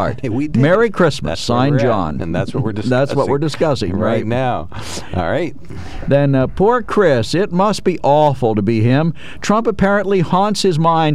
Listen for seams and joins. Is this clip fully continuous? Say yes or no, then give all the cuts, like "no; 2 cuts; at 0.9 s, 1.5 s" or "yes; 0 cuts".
yes; 0 cuts